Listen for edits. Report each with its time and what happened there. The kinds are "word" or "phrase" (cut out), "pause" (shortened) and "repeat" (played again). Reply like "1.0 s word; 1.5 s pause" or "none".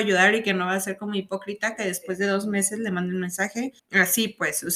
3.8 s pause